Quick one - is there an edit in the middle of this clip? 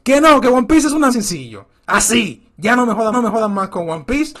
yes; 2 cuts; at 1.1 s, 3.1 s

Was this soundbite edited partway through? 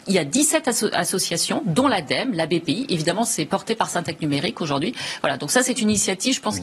no; 0 cuts

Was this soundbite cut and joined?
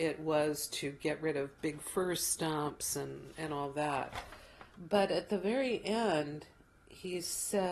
yes; 1 cut; at 4.7 s

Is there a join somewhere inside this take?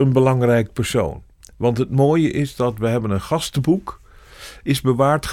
no; 0 cuts

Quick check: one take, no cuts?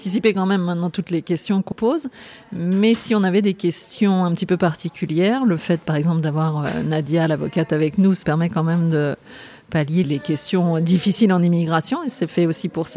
no; 3 cuts; at 1.7 s, 8.2 s, 10.0 s

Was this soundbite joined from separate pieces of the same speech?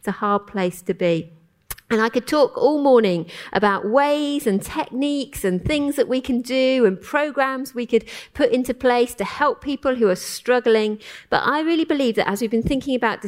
no; 0 cuts

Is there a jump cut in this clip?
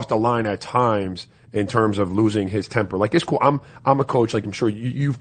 no; 0 cuts

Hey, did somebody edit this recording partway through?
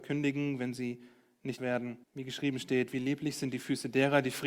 yes; 2 cuts; at 1.6 s, 2.0 s

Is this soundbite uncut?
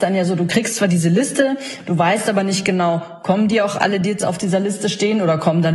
yes; 0 cuts

